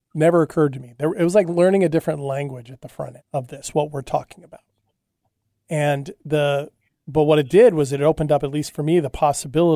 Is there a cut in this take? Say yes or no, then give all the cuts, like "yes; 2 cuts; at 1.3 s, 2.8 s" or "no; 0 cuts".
yes; 1 cut; at 3.2 s